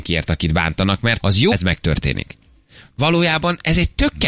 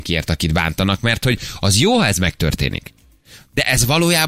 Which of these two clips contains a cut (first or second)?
first